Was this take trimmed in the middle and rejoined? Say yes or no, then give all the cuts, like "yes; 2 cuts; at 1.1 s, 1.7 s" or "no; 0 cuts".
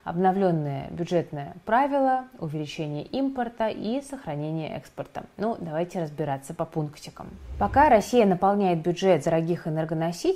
yes; 1 cut; at 9.2 s